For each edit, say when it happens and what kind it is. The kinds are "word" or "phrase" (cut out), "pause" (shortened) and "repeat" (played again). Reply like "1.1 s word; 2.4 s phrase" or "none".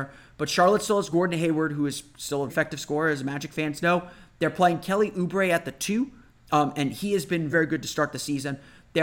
2.5 s word; 7.5 s word